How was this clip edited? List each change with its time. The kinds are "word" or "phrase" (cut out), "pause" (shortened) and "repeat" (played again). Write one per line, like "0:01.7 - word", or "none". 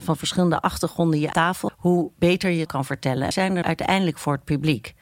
0:01.3 - word
0:01.7 - word
0:02.7 - word
0:03.3 - word
0:03.6 - word